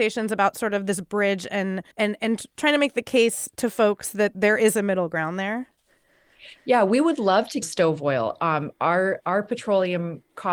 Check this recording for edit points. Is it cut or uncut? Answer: cut